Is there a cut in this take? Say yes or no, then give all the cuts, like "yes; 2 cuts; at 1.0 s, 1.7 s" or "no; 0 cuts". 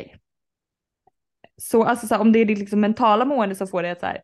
no; 0 cuts